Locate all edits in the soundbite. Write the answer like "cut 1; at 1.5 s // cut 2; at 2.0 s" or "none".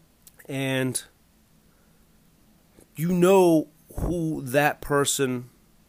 none